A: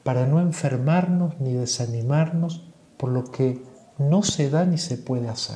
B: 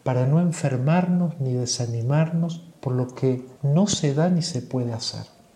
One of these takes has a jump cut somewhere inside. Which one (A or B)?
B